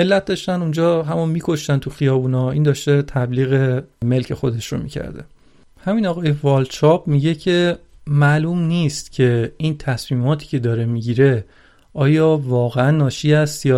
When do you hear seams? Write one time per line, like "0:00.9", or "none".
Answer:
none

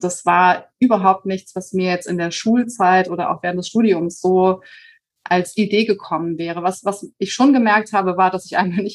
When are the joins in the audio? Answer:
none

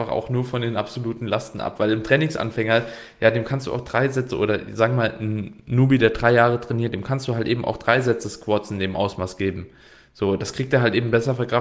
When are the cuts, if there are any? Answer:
none

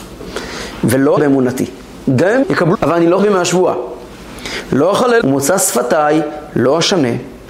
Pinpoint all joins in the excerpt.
0:01.2
0:02.4
0:02.7
0:03.2
0:05.2

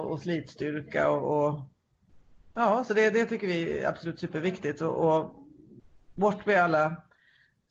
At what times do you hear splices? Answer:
none

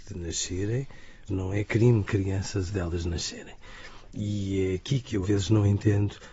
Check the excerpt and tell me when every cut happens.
0:01.3
0:02.1
0:02.7
0:05.2

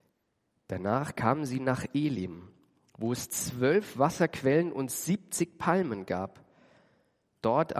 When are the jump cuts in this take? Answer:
none

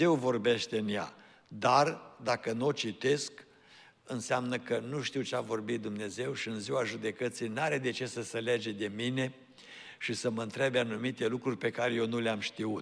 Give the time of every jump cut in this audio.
none

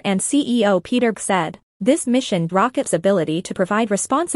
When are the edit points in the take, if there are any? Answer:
0:01.1
0:02.5
0:02.8

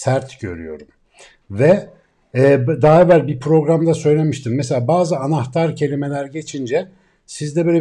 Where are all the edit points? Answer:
none

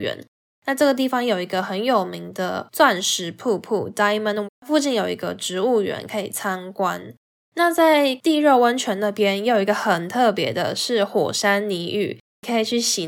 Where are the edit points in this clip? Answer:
0:04.4

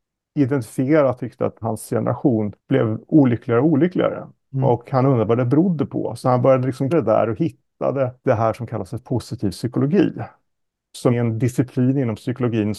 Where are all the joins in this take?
0:01.2
0:01.6
0:02.6
0:06.2
0:06.9
0:08.2
0:11.1

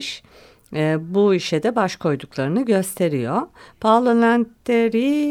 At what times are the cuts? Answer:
none

